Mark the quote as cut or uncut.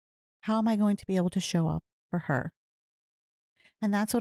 uncut